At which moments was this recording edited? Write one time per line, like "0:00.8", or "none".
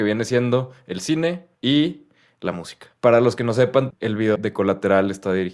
0:01.5
0:03.0
0:03.9
0:04.4